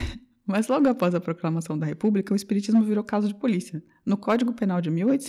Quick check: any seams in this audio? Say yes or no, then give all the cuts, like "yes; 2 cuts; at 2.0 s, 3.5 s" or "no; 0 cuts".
no; 0 cuts